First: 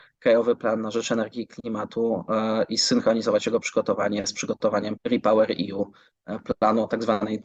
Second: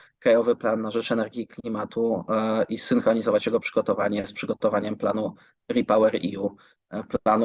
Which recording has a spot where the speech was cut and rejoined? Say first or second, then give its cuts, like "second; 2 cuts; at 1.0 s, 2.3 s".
first; 1 cut; at 5.0 s